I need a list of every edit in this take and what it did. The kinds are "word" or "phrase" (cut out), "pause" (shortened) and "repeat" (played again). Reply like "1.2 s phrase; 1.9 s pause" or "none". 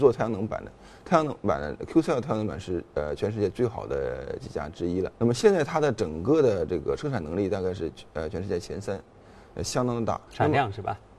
5.1 s pause; 10.3 s word

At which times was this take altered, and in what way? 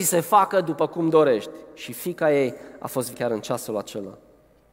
3.1 s word

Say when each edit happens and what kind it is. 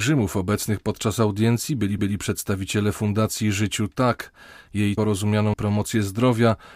2.0 s repeat; 5.0 s phrase; 5.5 s phrase

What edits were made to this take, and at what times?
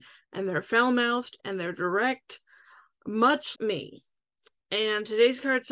3.6 s word

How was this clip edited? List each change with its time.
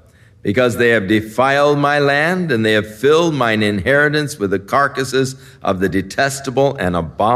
none

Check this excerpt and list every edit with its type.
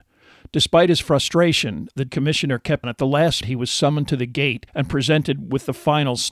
2.1 s word; 2.8 s phrase; 3.4 s word; 4.7 s pause

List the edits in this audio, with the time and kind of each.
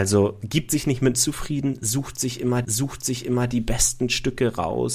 1.1 s word; 2.6 s repeat

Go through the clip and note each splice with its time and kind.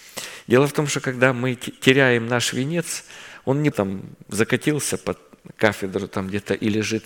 3.7 s word

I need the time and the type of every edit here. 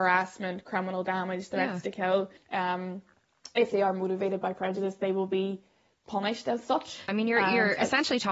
2.4 s pause; 7.1 s word

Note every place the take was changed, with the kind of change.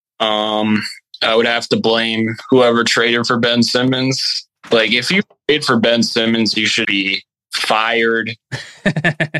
6.8 s word

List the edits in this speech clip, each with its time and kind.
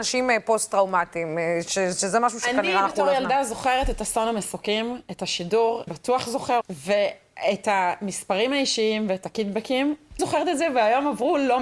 5.9 s word; 6.6 s word; 10.2 s word

